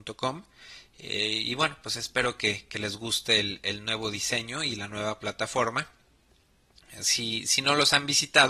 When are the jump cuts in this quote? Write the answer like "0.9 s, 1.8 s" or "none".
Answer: none